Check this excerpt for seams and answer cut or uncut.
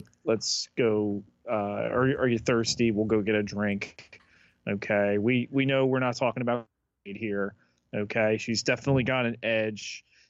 uncut